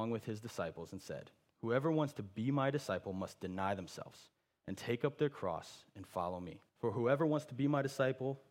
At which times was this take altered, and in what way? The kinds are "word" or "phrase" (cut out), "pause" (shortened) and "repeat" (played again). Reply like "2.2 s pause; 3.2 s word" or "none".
6.7 s pause

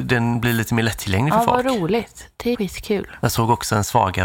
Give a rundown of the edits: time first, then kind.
2.5 s word

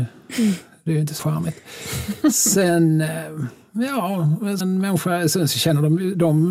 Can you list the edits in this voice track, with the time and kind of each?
1.2 s word; 4.6 s word

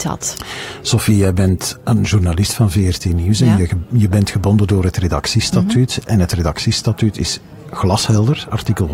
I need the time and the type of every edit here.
none

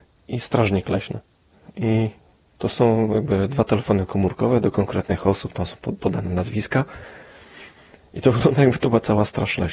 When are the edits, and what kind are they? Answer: none

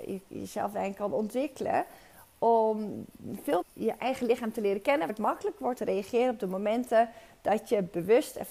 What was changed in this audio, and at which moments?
3.6 s phrase; 5.1 s word; 5.8 s word

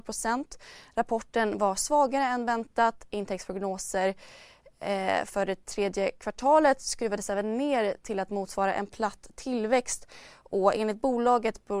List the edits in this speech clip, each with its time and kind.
none

